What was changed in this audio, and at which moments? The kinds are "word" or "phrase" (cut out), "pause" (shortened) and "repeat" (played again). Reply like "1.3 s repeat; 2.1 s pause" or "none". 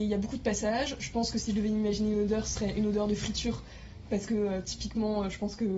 none